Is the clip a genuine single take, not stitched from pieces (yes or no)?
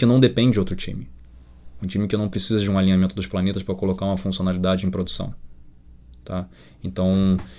yes